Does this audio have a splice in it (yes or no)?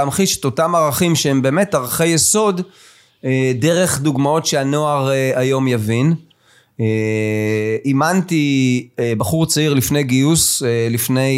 no